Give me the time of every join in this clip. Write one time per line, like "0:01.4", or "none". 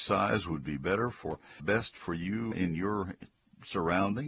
0:01.6
0:02.5